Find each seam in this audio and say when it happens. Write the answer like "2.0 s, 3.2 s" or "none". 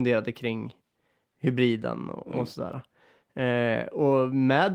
none